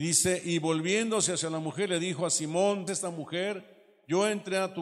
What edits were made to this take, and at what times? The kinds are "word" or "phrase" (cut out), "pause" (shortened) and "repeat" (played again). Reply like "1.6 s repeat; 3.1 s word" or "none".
2.9 s word